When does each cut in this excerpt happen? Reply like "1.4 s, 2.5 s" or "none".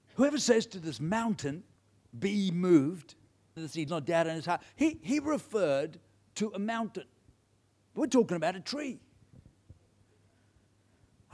1.8 s, 3.6 s, 3.9 s, 7.6 s